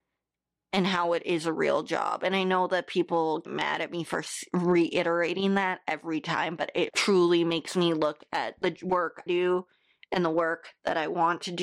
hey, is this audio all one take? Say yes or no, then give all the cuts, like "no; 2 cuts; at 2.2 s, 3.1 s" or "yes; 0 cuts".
no; 3 cuts; at 3.4 s, 6.9 s, 9.3 s